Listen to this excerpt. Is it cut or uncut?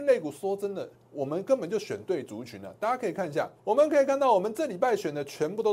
cut